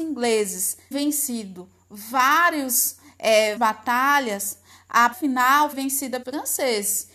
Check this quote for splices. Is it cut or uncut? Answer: cut